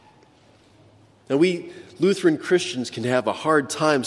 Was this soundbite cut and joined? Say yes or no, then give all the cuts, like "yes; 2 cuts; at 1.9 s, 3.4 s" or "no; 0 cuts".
no; 0 cuts